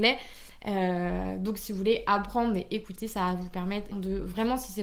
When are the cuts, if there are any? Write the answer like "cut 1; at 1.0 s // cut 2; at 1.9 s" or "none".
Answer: cut 1; at 3.9 s